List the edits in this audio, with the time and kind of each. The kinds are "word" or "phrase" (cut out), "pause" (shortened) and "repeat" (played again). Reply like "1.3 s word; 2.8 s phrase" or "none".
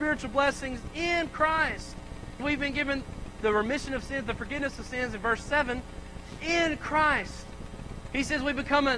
2.4 s word